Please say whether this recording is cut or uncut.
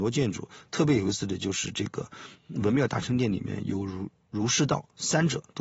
uncut